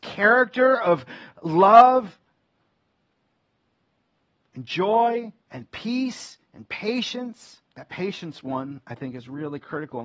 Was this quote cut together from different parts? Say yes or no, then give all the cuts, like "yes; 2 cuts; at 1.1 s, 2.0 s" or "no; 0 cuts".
yes; 2 cuts; at 5.4 s, 7.6 s